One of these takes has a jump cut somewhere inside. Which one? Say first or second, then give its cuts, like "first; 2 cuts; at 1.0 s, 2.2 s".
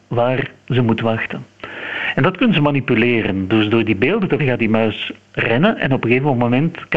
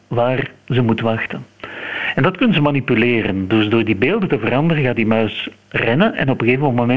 first; 1 cut; at 4.4 s